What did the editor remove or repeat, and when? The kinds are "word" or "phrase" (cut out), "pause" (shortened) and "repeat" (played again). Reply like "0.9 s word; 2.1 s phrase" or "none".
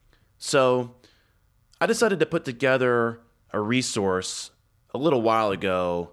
none